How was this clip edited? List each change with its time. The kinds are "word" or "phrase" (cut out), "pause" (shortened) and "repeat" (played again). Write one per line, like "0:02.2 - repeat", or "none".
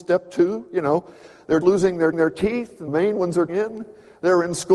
0:01.6 - word
0:02.1 - repeat
0:02.9 - word
0:03.5 - word

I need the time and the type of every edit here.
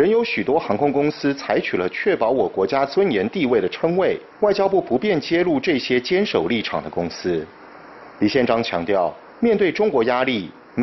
0:04.3 - pause

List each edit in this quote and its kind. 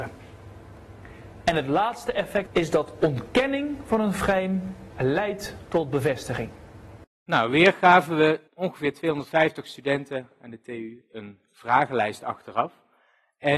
0:02.5 - phrase
0:08.5 - pause

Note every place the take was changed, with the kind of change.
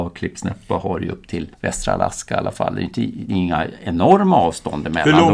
0:01.5 - pause

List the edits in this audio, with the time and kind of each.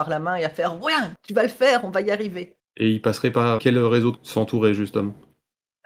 0:01.1 - word
0:03.6 - word
0:04.2 - phrase

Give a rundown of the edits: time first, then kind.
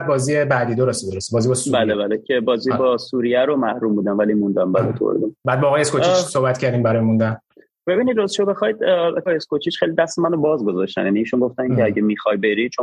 0:05.4 - pause
0:09.3 - word

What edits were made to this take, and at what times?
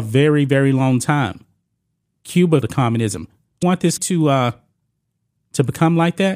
0:02.6 - word
0:03.6 - word
0:04.0 - word

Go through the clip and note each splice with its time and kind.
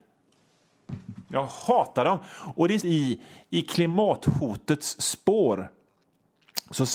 0:02.8 - phrase

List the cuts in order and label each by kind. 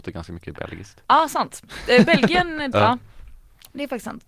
0:02.7 - word

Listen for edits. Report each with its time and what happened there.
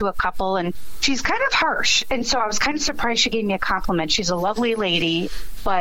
none

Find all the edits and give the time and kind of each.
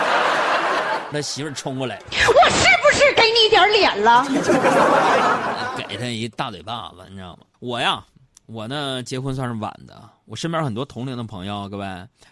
0:01.1 - phrase
0:07.5 - pause

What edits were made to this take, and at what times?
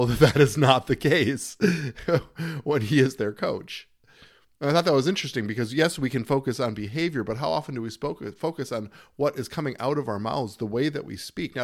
none

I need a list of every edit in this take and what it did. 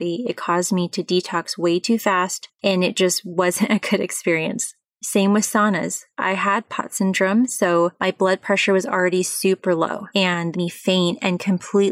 0:02.5 - pause
0:10.5 - phrase

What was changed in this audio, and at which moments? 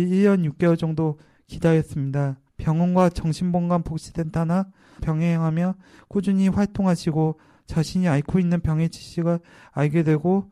0:02.5 - pause
0:05.0 - word

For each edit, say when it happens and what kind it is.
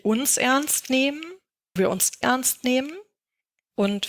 0:01.8 - word
0:02.2 - word

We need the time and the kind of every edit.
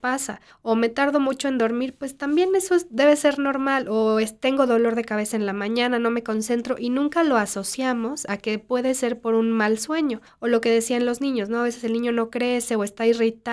none

